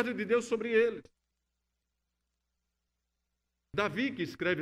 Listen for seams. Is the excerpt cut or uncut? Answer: uncut